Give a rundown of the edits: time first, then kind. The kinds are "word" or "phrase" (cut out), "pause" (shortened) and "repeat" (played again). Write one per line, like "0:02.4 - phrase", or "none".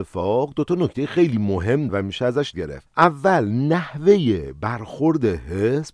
0:01.9 - word
0:02.5 - word